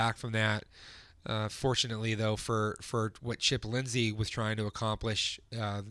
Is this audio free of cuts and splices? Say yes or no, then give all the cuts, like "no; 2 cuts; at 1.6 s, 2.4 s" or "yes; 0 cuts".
yes; 0 cuts